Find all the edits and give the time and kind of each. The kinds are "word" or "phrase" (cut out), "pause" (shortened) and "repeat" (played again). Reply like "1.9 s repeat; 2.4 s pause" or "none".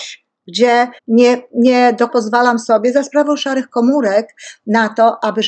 1.0 s pause; 2.1 s word